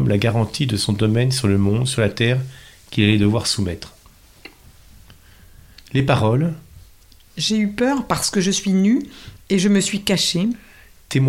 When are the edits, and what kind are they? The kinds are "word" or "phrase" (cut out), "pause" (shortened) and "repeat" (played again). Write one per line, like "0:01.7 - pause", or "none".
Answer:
none